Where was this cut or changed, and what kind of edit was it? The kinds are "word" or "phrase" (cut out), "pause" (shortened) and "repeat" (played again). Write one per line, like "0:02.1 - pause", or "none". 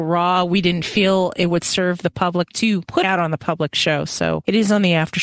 0:02.5 - word
0:03.0 - word